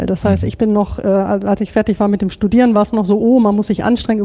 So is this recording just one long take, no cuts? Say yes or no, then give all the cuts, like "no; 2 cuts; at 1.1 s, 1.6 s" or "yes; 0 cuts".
yes; 0 cuts